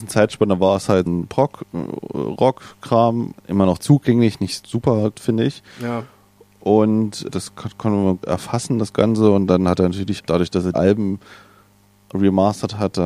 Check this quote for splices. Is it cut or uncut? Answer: cut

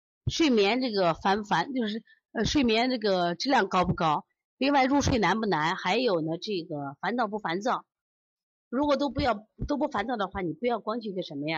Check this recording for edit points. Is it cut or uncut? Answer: uncut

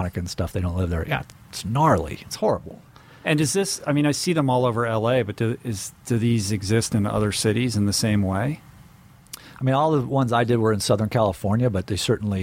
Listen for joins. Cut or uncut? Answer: uncut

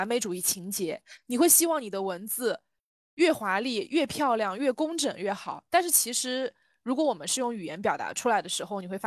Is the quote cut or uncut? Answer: uncut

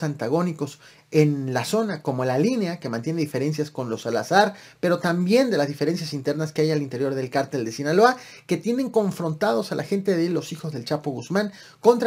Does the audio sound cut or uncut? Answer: uncut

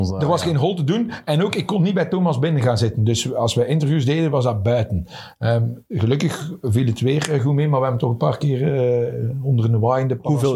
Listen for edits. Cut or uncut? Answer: uncut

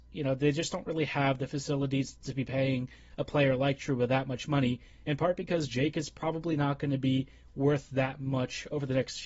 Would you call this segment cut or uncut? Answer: uncut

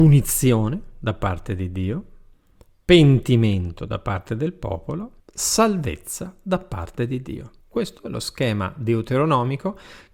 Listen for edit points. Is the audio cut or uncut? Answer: cut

